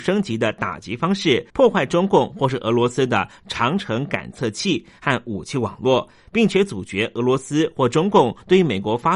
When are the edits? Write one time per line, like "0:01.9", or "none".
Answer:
0:01.5

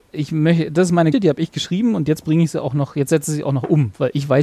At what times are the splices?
0:01.1

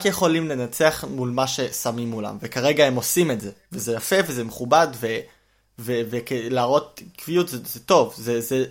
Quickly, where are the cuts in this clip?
none

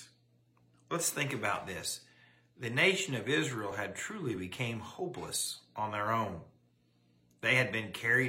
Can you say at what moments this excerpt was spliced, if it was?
none

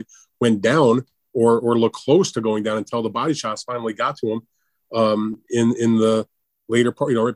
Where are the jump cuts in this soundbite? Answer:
none

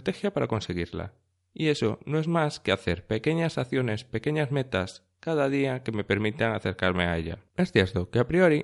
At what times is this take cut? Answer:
0:07.5

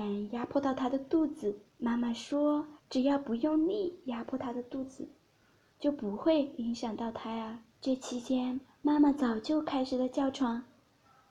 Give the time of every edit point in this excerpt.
0:01.7
0:02.8
0:07.7

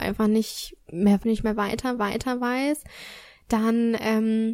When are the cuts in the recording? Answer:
0:01.2
0:02.0

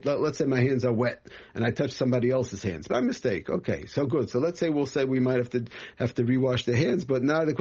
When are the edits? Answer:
none

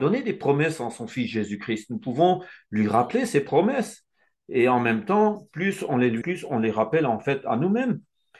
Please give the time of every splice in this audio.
0:06.2

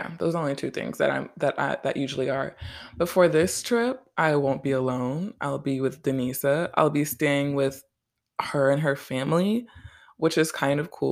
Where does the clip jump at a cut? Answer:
none

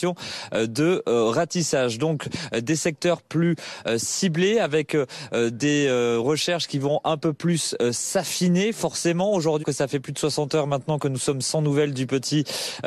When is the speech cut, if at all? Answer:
0:09.6

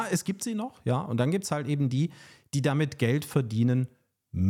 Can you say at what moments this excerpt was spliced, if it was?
none

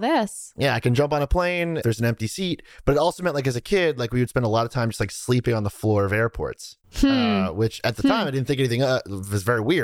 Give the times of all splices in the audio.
none

